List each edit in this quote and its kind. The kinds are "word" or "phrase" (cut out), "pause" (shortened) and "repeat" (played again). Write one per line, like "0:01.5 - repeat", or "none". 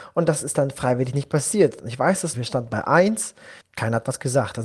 0:02.3 - word
0:03.6 - pause